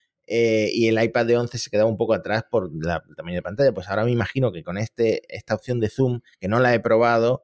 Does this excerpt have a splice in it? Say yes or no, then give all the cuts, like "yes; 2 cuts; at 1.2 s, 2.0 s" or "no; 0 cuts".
no; 0 cuts